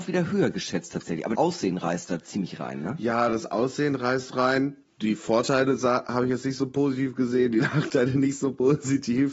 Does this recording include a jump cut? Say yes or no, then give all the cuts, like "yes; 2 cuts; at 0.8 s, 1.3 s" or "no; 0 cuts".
yes; 1 cut; at 1.3 s